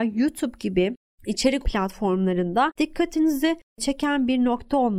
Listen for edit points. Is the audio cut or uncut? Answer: cut